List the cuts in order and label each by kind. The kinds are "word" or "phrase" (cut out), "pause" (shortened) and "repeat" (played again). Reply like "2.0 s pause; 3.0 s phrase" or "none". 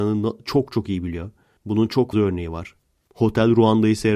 2.1 s word